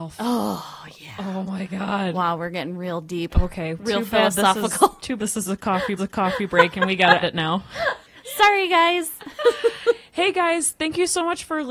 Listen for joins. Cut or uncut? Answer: cut